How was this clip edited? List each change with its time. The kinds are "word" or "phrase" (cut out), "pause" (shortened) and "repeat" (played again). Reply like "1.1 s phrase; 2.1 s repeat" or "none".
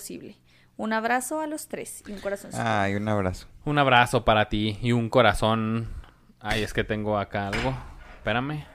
none